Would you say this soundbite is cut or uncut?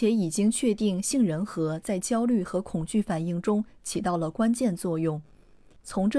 uncut